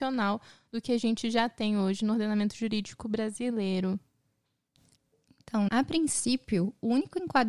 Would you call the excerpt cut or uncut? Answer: cut